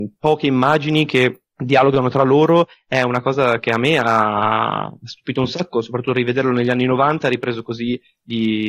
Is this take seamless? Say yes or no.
no